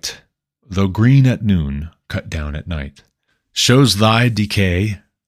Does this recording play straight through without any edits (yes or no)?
yes